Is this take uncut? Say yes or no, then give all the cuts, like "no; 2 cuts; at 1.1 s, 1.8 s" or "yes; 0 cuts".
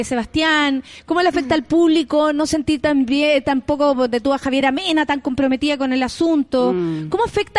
yes; 0 cuts